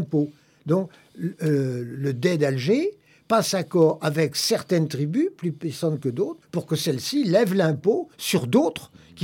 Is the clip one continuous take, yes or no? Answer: no